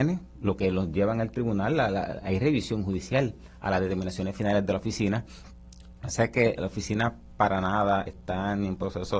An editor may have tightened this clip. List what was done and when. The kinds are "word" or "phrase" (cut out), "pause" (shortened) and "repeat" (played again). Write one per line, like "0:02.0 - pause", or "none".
0:06.6 - word
0:08.1 - word